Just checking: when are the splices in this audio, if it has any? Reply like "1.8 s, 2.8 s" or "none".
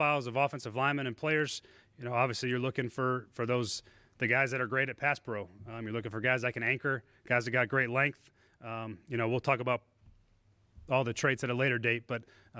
none

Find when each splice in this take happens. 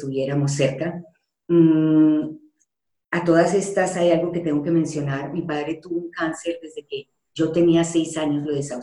none

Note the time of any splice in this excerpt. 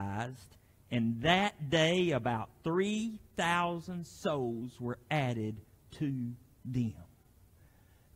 none

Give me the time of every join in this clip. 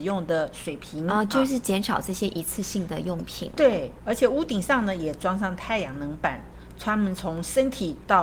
none

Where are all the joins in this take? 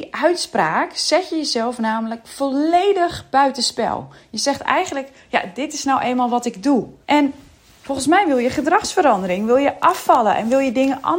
7.0 s

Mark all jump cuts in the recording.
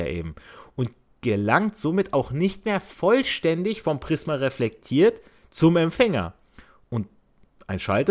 none

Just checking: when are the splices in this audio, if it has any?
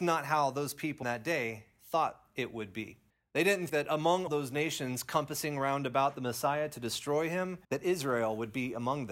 1.0 s, 3.1 s, 3.7 s, 4.3 s, 7.6 s

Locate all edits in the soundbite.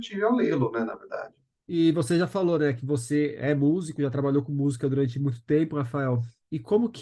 1.6 s

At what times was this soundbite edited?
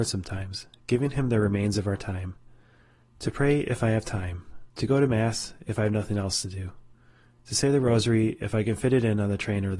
4.7 s

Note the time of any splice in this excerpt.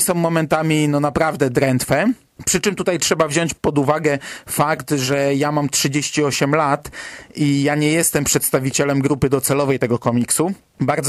none

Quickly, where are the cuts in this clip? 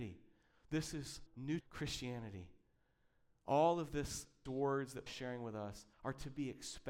1.3 s, 1.6 s, 4.5 s, 5.1 s, 5.9 s

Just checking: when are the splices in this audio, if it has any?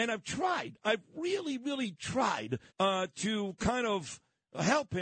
2.7 s

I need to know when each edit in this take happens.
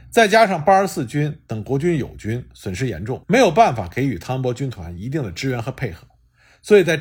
3.2 s

